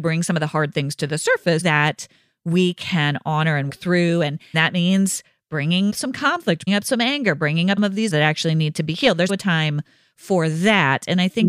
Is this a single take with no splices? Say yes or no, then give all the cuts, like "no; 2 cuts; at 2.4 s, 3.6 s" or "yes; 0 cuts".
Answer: no; 8 cuts; at 1.6 s, 3.7 s, 4.5 s, 5.9 s, 6.7 s, 7.8 s, 8.1 s, 9.3 s